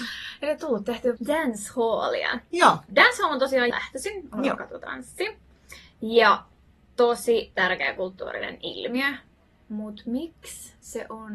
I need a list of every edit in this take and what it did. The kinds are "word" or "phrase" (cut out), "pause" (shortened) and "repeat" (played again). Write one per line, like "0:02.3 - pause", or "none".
0:01.2 - word
0:03.7 - word